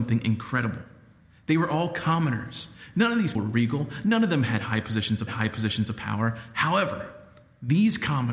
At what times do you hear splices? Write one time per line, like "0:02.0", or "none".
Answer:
0:03.4
0:05.3